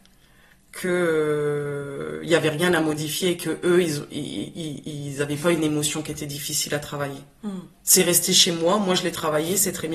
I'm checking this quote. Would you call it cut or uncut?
cut